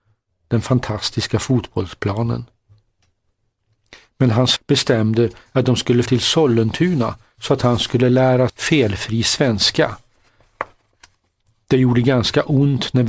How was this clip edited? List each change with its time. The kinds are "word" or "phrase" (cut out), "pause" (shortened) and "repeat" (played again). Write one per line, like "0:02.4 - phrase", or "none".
0:04.6 - word
0:06.1 - word
0:08.5 - word